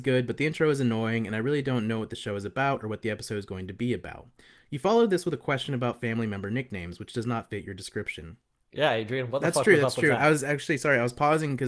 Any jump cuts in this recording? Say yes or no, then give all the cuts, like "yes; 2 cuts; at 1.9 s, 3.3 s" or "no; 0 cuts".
no; 0 cuts